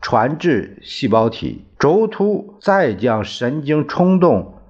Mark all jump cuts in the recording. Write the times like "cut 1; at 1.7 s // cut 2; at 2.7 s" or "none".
cut 1; at 1.7 s // cut 2; at 2.6 s